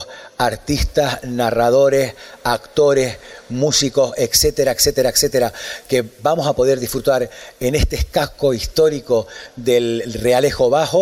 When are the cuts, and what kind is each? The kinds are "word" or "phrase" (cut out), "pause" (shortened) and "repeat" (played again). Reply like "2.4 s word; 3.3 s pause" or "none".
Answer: none